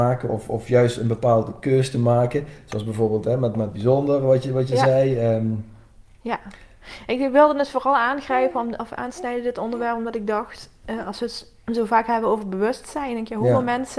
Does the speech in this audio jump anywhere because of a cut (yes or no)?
no